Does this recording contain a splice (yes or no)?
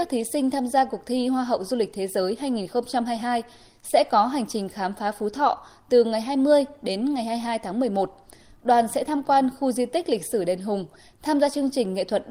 no